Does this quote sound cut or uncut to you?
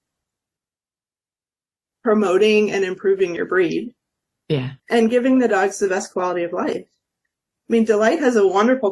cut